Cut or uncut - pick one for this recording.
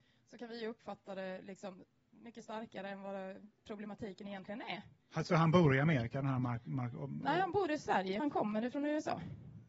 cut